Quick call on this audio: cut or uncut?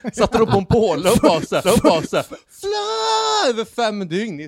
cut